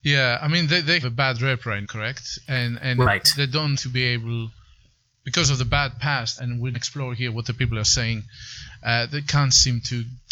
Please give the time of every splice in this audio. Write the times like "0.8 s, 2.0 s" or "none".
1.0 s, 1.8 s, 3.8 s, 6.4 s, 6.7 s